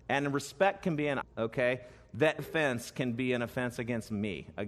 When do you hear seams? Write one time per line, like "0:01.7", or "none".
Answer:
0:01.2
0:02.4